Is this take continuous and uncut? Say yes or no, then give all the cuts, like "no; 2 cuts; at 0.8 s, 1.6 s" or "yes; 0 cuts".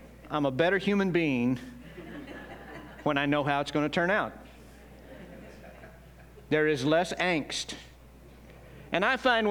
yes; 0 cuts